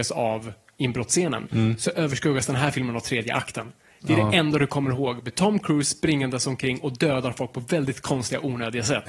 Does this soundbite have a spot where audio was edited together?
no; 0 cuts

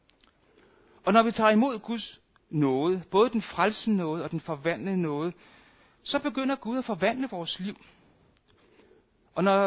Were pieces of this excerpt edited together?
no; 0 cuts

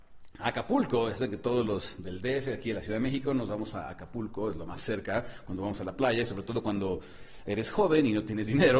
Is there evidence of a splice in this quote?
no; 0 cuts

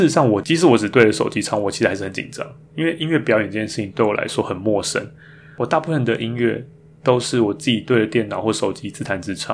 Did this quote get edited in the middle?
no; 0 cuts

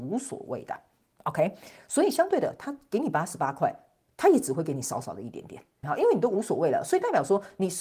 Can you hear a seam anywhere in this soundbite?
yes; 1 cut; at 5.8 s

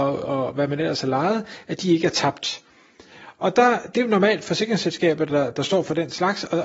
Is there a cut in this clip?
no; 0 cuts

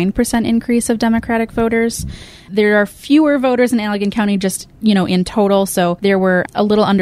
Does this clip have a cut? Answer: no; 0 cuts

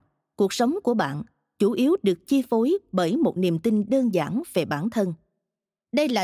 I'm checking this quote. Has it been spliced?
no; 0 cuts

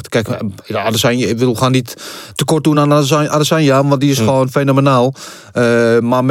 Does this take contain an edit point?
no; 0 cuts

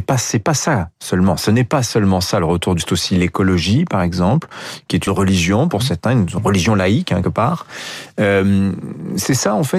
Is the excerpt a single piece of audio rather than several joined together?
no; 3 cuts; at 2.8 s, 5.1 s, 7.2 s

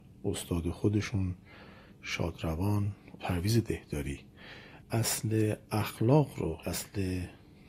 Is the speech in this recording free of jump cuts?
no; 3 cuts; at 3.2 s, 4.8 s, 6.6 s

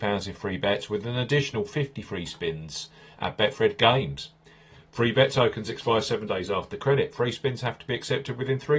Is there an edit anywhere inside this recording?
no; 0 cuts

